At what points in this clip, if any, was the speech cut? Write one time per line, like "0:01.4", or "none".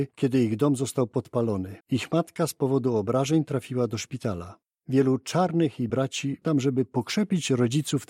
0:01.8
0:04.6
0:05.9
0:06.4